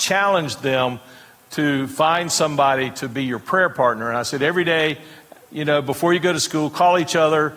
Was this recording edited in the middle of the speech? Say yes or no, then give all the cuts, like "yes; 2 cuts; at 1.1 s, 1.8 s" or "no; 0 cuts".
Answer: no; 0 cuts